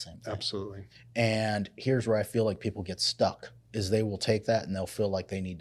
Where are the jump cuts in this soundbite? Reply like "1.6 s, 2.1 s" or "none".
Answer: 3.6 s